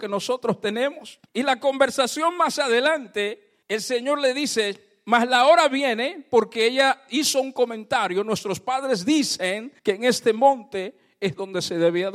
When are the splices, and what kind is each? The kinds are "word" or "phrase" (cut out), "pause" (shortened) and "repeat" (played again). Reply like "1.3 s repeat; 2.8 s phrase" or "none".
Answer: 1.3 s pause; 3.6 s pause; 9.8 s pause